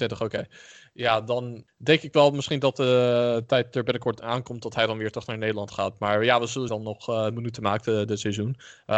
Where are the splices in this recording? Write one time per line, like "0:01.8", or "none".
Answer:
0:01.7
0:06.7